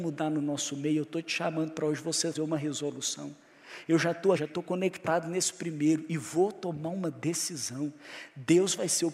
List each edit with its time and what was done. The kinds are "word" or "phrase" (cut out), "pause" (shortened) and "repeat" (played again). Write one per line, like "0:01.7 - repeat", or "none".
0:02.3 - word
0:04.4 - word

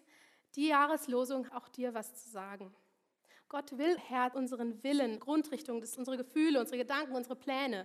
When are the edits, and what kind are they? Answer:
0:01.5 - word
0:04.0 - word
0:04.3 - word
0:05.2 - word
0:06.0 - word

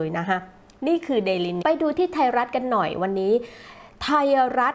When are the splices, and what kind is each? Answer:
0:01.6 - phrase

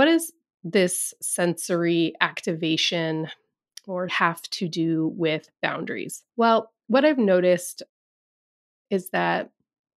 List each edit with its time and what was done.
0:04.1 - word
0:06.3 - pause

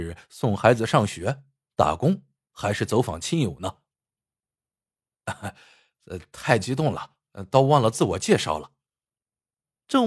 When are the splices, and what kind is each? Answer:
none

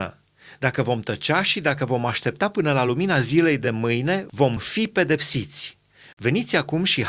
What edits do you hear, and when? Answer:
none

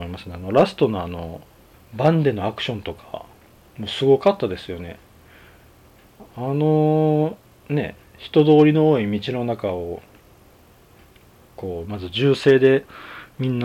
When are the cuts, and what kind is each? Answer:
0:01.7 - phrase

